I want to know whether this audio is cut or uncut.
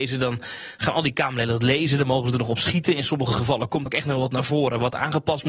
cut